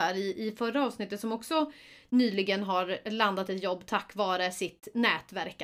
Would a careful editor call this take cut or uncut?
uncut